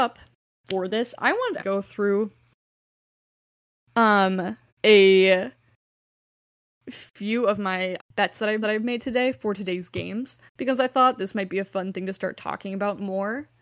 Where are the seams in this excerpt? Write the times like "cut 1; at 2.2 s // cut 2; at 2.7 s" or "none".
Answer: cut 1; at 1.6 s // cut 2; at 4.7 s // cut 3; at 8.0 s // cut 4; at 8.6 s // cut 5; at 10.5 s